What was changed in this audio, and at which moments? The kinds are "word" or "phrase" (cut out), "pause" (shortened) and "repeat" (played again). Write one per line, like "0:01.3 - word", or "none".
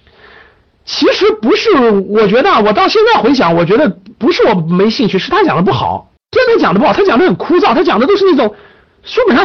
0:06.2 - pause